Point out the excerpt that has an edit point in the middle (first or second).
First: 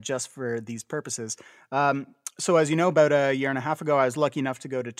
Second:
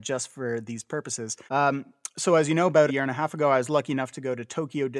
second